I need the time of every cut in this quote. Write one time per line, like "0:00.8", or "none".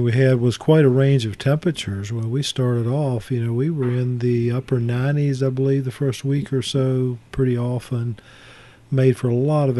none